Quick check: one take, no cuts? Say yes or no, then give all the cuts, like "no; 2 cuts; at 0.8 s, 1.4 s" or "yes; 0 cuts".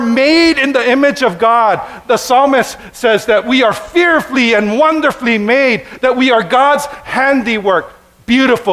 yes; 0 cuts